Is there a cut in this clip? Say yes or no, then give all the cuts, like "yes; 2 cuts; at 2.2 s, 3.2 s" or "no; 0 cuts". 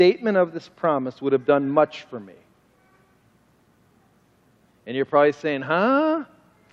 no; 0 cuts